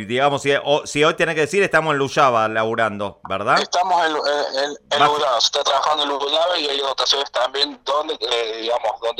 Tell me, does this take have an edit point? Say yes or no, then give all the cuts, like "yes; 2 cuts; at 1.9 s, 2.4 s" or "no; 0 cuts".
no; 0 cuts